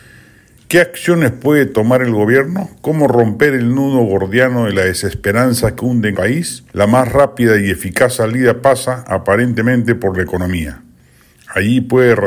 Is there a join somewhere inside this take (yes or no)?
yes